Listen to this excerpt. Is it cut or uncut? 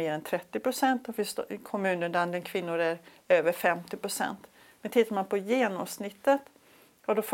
uncut